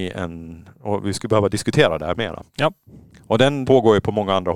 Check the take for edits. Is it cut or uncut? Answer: cut